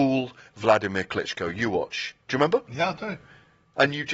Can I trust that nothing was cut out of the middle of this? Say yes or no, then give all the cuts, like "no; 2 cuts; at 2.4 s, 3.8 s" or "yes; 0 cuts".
yes; 0 cuts